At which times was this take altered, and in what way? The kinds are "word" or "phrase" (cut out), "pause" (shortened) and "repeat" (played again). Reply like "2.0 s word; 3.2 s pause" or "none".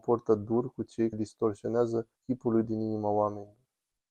1.1 s word; 2.2 s pause; 2.6 s word

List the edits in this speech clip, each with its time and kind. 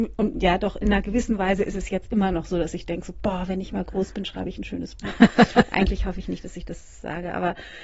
none

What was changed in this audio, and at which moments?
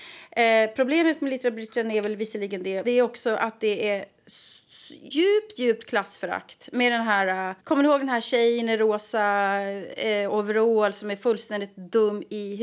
2.8 s word; 5.1 s word; 7.6 s pause

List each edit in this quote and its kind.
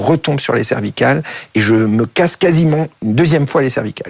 none

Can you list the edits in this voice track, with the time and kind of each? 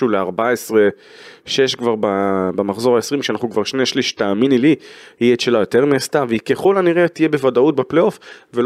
none

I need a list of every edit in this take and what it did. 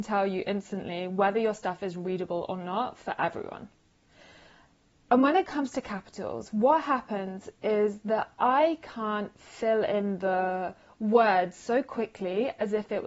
none

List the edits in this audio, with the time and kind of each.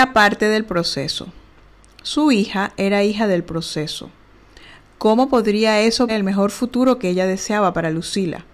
6.1 s word

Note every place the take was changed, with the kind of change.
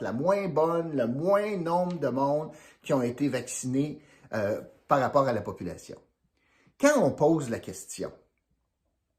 none

